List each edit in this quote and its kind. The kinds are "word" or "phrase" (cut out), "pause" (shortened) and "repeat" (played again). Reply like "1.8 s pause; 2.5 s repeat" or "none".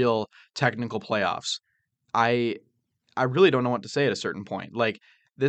none